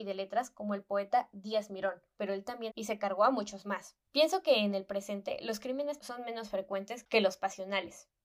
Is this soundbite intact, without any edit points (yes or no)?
no